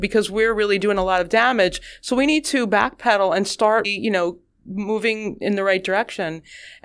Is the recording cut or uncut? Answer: cut